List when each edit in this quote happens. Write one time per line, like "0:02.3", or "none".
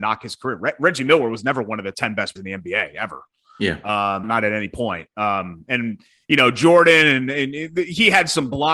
0:02.4
0:04.2